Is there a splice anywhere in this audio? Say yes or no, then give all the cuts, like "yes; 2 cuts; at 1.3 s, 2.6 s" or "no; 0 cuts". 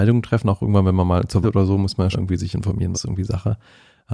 yes; 3 cuts; at 1.4 s, 2.1 s, 2.9 s